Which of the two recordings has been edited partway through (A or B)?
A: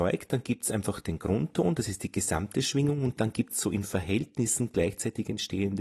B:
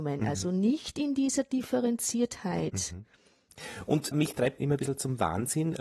B